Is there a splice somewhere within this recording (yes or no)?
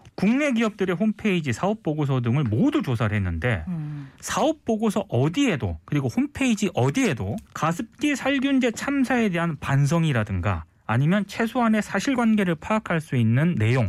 yes